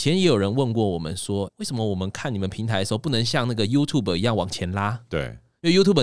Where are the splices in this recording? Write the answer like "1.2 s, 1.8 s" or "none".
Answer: 1.5 s